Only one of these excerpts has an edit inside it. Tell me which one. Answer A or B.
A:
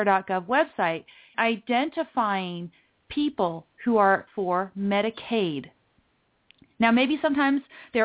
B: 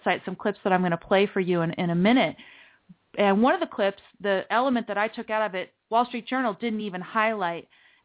A